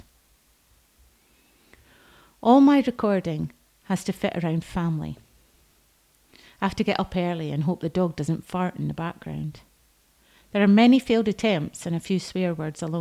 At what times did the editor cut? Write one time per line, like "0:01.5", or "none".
none